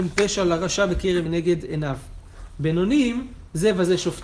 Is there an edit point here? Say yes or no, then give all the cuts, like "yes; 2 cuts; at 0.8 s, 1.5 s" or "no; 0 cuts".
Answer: yes; 1 cut; at 1.3 s